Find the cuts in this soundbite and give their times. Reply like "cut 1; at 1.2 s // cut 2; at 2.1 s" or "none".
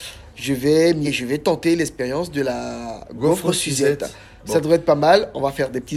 cut 1; at 1.0 s